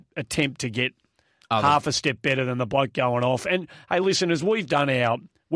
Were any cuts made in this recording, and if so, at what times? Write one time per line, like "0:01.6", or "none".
none